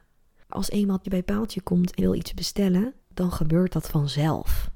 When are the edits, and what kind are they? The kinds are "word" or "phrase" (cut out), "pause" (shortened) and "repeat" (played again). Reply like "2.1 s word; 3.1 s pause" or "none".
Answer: 1.0 s word; 2.0 s word; 3.0 s pause